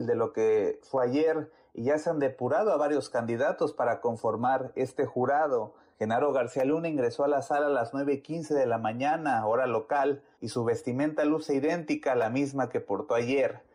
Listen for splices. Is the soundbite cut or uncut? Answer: uncut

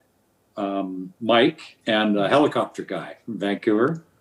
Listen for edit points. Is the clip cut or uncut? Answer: cut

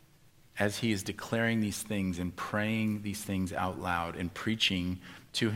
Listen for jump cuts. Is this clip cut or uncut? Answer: uncut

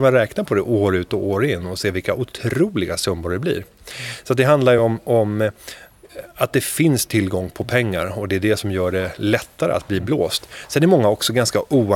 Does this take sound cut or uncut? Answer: uncut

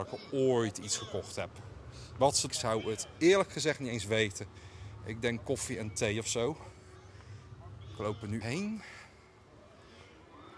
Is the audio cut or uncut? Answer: cut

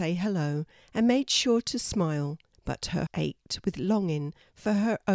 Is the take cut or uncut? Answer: cut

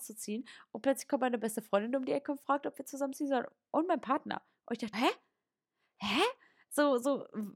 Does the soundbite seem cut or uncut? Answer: cut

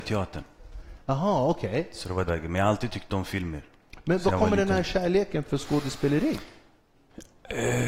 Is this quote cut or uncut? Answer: cut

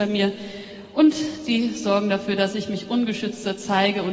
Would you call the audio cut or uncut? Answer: uncut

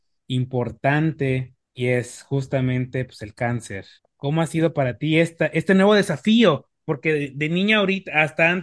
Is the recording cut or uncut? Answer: cut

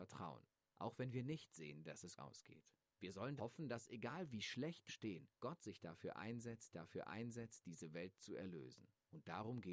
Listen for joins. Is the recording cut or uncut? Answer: cut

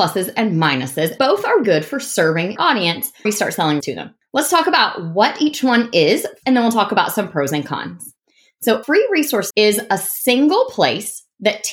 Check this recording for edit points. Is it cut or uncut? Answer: cut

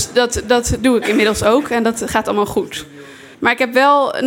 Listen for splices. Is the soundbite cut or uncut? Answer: cut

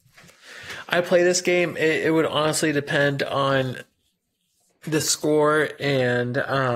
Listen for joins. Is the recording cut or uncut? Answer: uncut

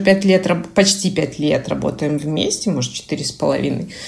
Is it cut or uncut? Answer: uncut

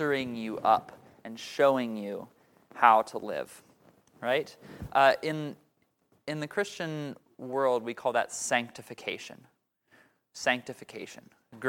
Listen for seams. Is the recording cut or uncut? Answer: uncut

